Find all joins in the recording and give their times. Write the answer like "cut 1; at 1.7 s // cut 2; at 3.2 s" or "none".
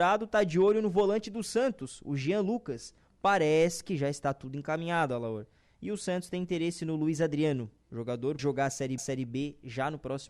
cut 1; at 8.4 s // cut 2; at 9.0 s